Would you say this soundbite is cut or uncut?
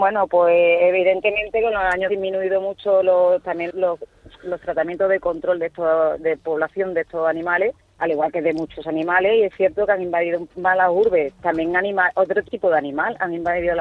cut